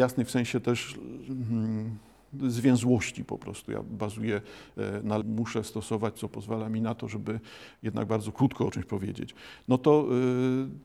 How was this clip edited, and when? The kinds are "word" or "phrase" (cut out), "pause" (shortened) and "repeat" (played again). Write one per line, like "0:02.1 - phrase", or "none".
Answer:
0:02.4 - word
0:05.2 - word
0:06.2 - word